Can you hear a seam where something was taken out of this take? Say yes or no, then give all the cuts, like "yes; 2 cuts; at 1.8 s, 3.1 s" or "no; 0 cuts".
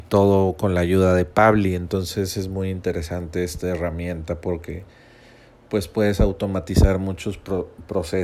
no; 0 cuts